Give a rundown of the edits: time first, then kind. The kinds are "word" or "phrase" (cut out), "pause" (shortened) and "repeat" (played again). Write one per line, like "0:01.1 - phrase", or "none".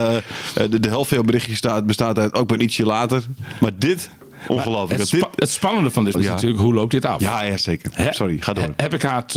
0:06.1 - word